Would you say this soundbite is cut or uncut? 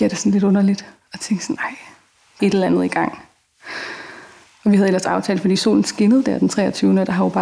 cut